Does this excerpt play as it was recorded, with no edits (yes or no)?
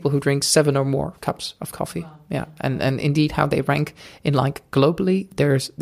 yes